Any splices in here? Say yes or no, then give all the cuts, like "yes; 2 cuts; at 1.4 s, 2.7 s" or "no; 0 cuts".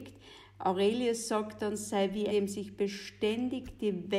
yes; 1 cut; at 2.3 s